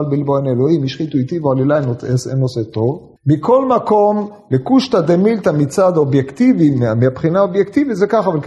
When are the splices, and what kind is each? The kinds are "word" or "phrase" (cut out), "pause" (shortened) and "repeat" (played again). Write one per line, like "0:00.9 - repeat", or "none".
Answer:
0:03.2 - pause